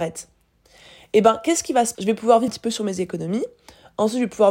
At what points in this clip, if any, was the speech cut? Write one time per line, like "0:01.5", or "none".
0:01.9
0:02.5